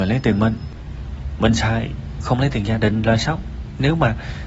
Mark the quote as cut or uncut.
uncut